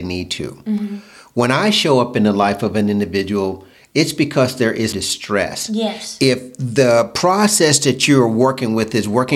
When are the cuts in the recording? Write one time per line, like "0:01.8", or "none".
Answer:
0:04.9